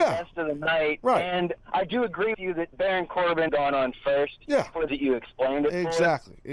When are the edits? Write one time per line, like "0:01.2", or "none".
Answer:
0:01.6
0:02.3
0:02.7
0:03.5
0:04.9

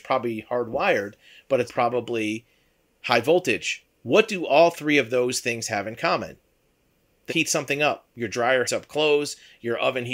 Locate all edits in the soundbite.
0:01.7
0:04.0
0:07.3
0:08.1
0:08.7

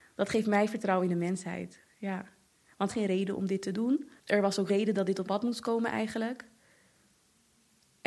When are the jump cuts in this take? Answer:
0:02.9
0:04.2
0:04.7
0:05.2

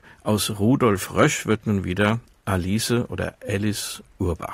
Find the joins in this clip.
none

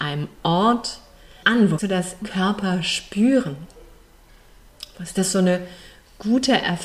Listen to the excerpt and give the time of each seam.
0:01.4
0:01.8
0:02.2

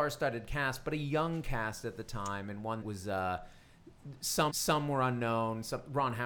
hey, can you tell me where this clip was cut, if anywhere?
0:02.8
0:04.5

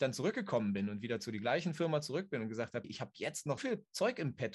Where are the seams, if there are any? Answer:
0:02.8
0:03.6

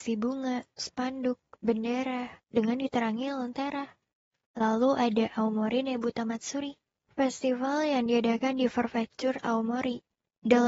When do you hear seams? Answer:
none

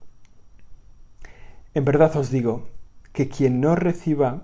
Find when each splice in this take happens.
none

